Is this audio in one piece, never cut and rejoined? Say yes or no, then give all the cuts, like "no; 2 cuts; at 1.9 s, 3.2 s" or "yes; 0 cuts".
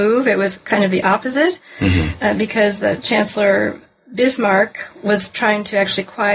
yes; 0 cuts